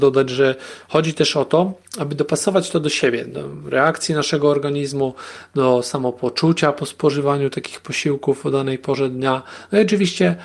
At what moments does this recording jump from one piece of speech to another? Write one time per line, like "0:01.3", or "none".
none